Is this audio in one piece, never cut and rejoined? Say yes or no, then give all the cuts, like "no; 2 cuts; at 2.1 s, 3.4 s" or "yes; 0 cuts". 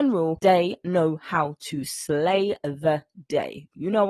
yes; 0 cuts